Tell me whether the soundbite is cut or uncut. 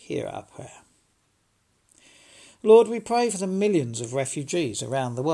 uncut